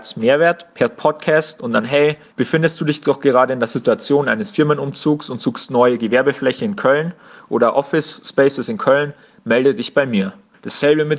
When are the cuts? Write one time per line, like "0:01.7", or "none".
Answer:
none